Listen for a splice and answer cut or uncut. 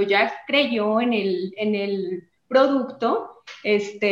cut